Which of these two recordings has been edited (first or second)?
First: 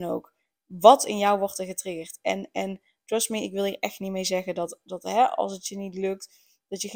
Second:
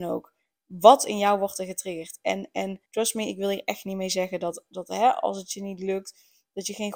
second